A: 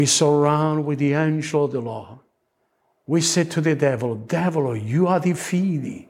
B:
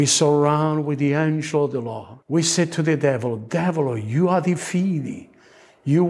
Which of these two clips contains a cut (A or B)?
B